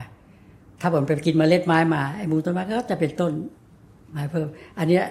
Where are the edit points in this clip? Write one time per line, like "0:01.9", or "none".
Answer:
none